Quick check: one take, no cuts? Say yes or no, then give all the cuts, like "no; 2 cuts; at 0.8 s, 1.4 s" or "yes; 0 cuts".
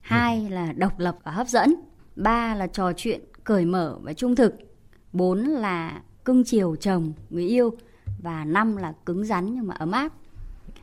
no; 2 cuts; at 1.2 s, 2.0 s